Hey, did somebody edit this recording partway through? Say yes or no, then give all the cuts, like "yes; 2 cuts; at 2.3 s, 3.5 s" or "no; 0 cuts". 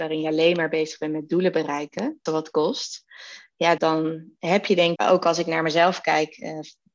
yes; 3 cuts; at 2.3 s, 3.8 s, 5.0 s